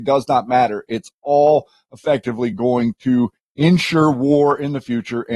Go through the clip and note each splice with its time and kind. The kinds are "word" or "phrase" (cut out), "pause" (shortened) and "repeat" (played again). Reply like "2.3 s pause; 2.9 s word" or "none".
none